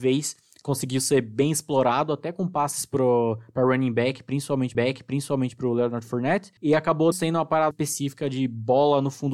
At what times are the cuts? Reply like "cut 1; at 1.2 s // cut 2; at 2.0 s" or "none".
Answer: cut 1; at 4.7 s // cut 2; at 6.6 s // cut 3; at 7.1 s // cut 4; at 7.7 s